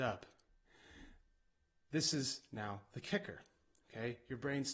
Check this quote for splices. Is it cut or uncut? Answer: uncut